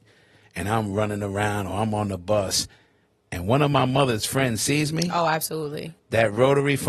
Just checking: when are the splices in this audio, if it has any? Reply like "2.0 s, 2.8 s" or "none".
none